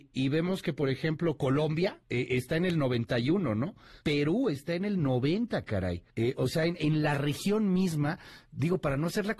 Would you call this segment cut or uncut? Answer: cut